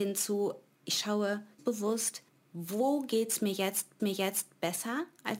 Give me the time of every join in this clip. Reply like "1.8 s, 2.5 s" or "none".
1.6 s, 2.3 s, 4.0 s